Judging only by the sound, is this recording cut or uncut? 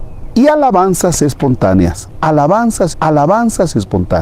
cut